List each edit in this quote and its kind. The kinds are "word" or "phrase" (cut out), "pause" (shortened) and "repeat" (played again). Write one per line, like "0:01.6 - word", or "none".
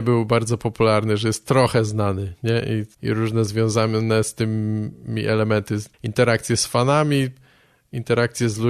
0:02.9 - pause
0:05.9 - pause

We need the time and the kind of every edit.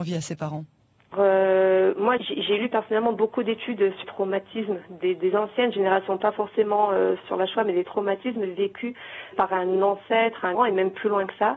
0:01.1 - word
0:02.2 - word
0:04.0 - word
0:07.2 - word
0:09.3 - word
0:10.5 - word

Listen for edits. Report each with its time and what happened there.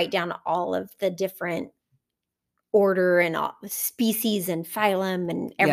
none

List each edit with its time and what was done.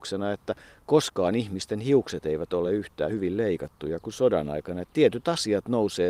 none

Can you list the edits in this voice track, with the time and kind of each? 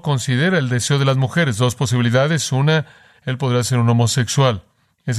none

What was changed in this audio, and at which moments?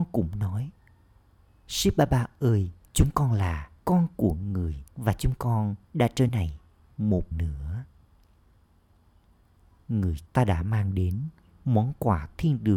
0:02.8 - pause
0:03.8 - pause
0:04.9 - pause
0:05.8 - pause
0:06.3 - phrase
0:07.3 - word
0:10.3 - phrase

